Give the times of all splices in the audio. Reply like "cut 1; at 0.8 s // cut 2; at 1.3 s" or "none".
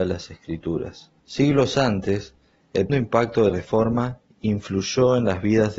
cut 1; at 1.2 s // cut 2; at 2.9 s // cut 3; at 3.5 s